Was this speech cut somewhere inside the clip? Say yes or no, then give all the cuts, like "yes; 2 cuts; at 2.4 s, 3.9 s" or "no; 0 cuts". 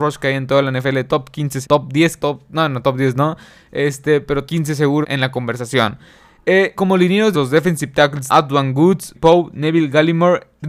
yes; 8 cuts; at 1.6 s, 2.2 s, 4.5 s, 5.0 s, 6.7 s, 7.3 s, 8.3 s, 9.1 s